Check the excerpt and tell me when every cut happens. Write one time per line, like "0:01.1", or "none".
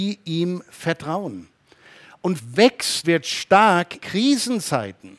0:02.4
0:03.0
0:04.0